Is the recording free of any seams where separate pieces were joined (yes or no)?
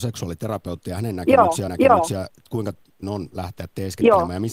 no